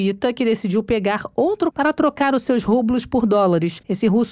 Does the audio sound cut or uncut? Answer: cut